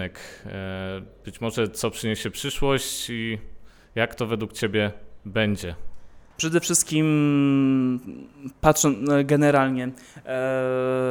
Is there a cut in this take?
no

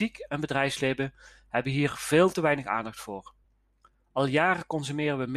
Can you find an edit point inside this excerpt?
no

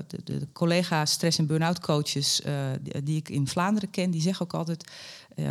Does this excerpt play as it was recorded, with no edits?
yes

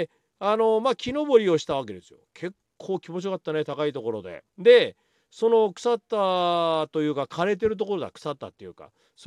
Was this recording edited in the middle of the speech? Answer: yes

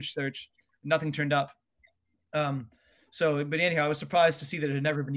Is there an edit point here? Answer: no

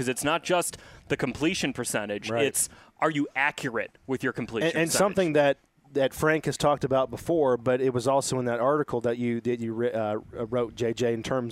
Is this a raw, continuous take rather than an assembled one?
yes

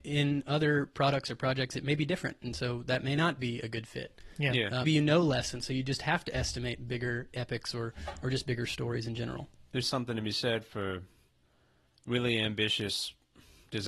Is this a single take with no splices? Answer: no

